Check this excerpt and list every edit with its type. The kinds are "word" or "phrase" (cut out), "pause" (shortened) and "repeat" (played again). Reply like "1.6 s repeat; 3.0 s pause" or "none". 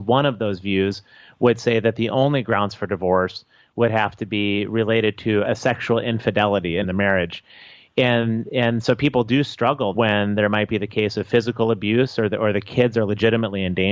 5.4 s word; 6.8 s word; 9.9 s word